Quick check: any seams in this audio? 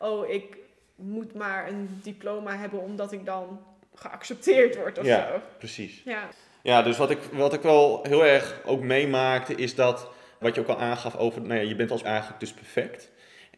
yes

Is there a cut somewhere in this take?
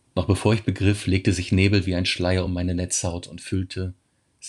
no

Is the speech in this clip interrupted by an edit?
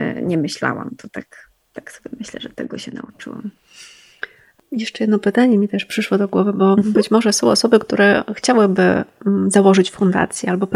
no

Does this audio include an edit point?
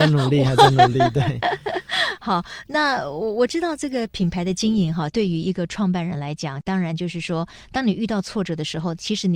no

